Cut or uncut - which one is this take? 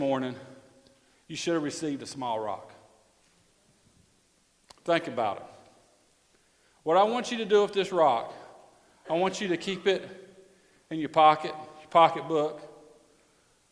uncut